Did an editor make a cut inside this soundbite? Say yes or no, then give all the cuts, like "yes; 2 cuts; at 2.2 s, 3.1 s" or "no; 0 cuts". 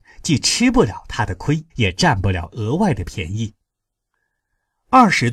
yes; 1 cut; at 1.7 s